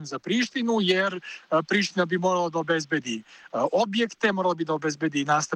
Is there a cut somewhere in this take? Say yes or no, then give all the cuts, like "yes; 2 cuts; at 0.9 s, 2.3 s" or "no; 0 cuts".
no; 0 cuts